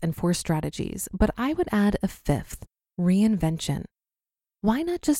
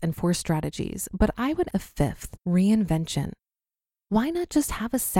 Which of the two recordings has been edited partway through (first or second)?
second